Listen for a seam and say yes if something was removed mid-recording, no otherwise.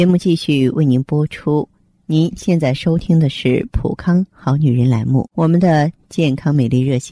yes